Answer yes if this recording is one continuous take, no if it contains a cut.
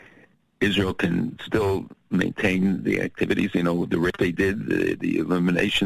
yes